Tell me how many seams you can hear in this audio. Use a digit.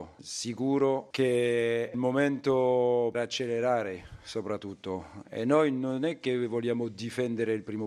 2